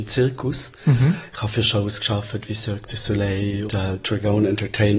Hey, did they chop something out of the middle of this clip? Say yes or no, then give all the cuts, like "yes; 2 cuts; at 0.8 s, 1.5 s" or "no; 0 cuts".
yes; 1 cut; at 3.7 s